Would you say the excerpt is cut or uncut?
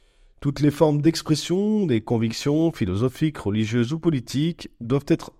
uncut